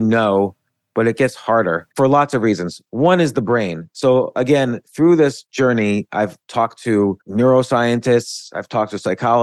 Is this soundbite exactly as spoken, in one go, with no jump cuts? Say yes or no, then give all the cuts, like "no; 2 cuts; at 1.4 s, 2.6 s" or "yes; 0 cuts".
no; 3 cuts; at 1.9 s, 6.4 s, 7.2 s